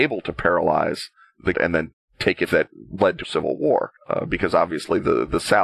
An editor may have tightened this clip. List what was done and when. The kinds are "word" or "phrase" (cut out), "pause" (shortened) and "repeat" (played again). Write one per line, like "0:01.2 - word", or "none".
0:01.5 - word
0:02.5 - word
0:03.2 - word
0:04.0 - pause